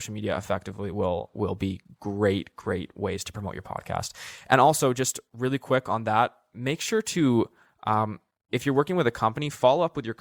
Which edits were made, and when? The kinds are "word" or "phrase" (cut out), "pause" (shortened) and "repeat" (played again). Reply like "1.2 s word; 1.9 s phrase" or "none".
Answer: none